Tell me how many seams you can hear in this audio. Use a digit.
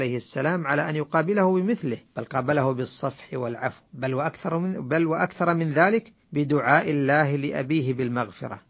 3